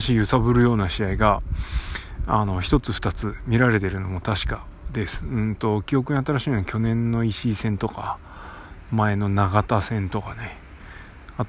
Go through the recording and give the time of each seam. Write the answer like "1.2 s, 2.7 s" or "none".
none